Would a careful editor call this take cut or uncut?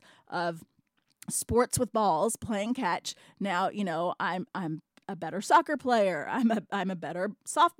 uncut